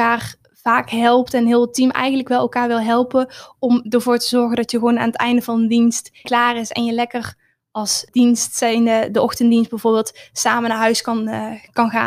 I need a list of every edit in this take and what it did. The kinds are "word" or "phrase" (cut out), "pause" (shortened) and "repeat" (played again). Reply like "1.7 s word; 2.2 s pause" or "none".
6.2 s word; 8.1 s word